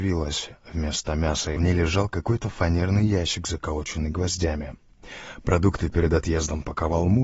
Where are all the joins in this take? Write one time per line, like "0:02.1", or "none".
0:01.6